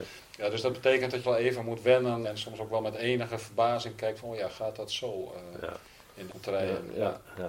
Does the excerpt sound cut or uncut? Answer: cut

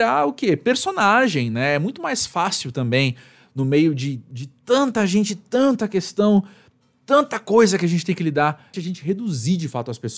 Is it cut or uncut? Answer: cut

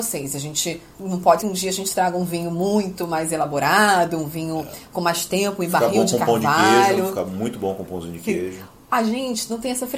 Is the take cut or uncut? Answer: cut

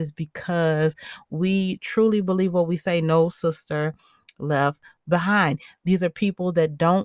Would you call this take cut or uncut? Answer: uncut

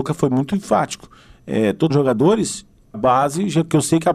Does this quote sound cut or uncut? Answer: cut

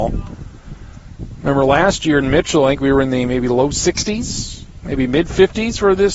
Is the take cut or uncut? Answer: uncut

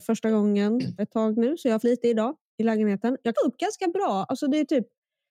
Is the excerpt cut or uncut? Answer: cut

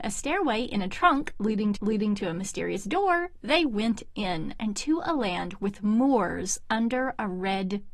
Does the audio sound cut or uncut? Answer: cut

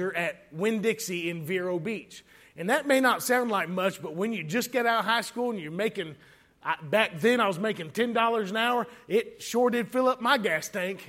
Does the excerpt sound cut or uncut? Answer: uncut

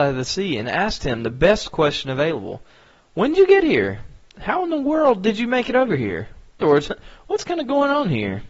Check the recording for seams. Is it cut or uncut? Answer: cut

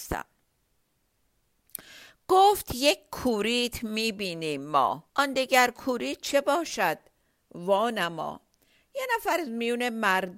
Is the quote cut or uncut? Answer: cut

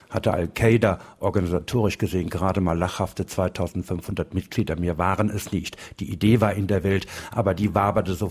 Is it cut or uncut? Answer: uncut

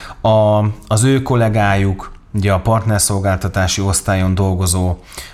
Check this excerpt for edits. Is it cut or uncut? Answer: uncut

